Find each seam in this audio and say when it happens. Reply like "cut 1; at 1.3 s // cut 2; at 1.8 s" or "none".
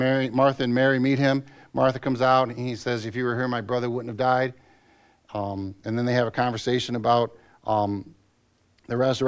none